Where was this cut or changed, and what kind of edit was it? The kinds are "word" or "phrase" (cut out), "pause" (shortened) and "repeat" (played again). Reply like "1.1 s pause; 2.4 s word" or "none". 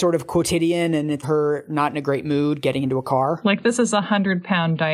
1.2 s word